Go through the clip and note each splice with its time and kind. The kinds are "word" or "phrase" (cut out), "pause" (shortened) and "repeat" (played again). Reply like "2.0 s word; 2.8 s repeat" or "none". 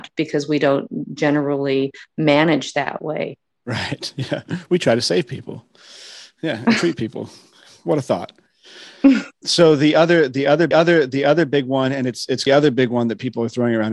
9.4 s word; 10.7 s repeat; 12.5 s phrase